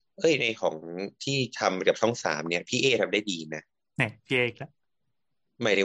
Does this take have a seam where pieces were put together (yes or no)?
no